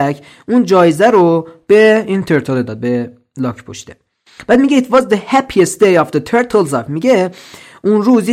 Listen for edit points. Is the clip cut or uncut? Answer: uncut